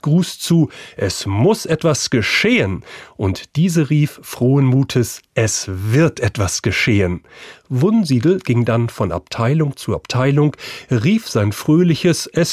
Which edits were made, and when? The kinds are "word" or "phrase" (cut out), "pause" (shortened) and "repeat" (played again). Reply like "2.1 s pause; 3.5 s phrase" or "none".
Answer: none